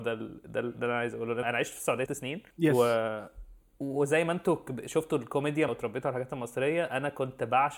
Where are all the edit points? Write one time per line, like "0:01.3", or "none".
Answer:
0:01.4
0:02.1
0:02.5
0:05.7